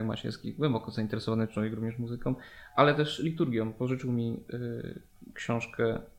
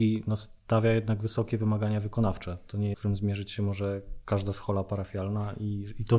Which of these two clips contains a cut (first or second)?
second